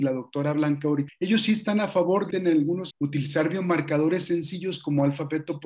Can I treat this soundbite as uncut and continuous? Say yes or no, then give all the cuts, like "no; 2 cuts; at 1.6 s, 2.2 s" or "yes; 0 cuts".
no; 3 cuts; at 1.1 s, 2.3 s, 2.9 s